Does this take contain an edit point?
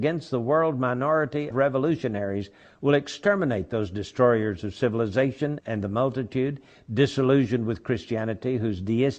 yes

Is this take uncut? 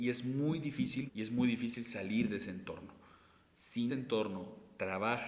no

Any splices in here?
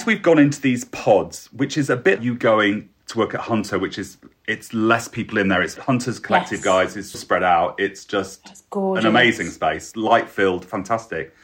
yes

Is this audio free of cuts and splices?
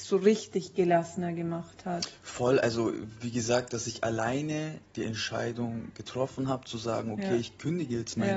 yes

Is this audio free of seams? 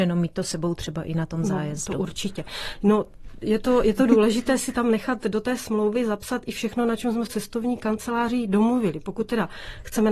no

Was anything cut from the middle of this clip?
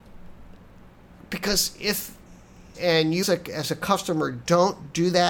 yes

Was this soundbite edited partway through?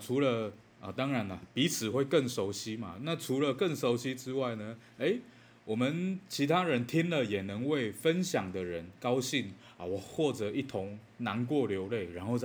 no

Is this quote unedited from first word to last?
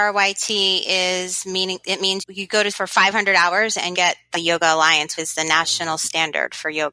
no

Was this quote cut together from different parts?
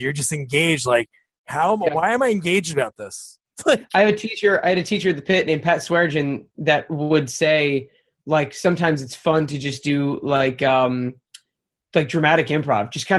no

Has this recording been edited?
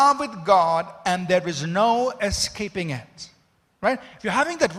no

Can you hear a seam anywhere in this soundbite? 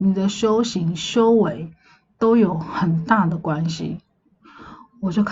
no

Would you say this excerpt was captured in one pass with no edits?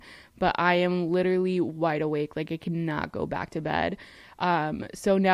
yes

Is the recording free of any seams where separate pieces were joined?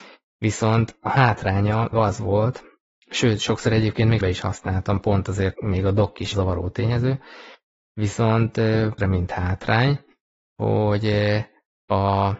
no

